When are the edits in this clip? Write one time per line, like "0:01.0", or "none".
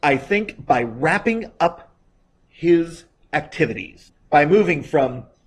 none